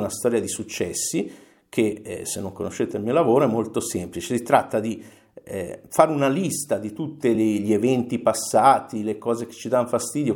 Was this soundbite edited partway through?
no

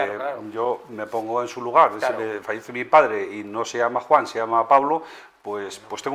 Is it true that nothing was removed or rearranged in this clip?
yes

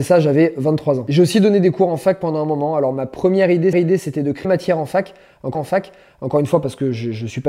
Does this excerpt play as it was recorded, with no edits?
no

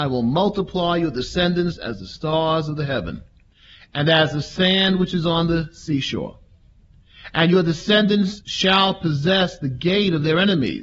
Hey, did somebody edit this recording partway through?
no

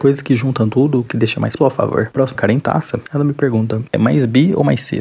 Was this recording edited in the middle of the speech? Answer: yes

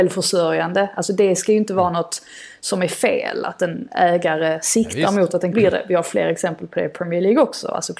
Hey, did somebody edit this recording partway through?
yes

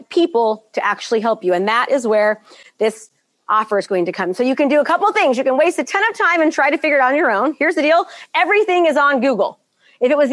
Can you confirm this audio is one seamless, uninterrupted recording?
yes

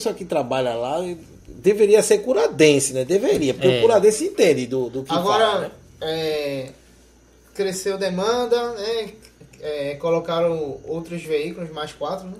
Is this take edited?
no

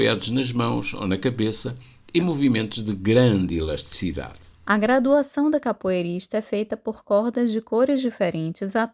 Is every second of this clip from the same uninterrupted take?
yes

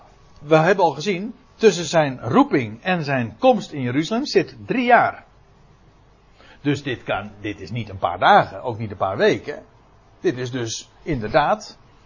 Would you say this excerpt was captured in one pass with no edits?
yes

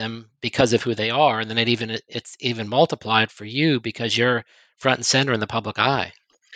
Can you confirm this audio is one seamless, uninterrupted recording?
yes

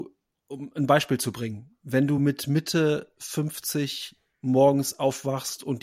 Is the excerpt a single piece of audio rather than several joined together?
yes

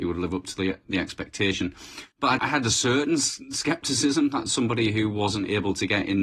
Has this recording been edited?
yes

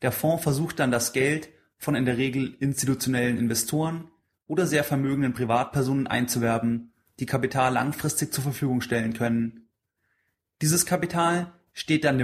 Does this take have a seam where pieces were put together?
no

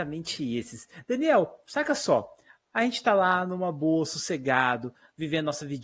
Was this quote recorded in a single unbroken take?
yes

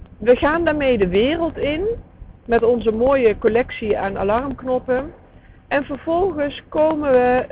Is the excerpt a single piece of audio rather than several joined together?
yes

